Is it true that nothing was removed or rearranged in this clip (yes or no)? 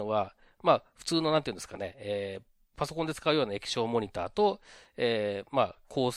yes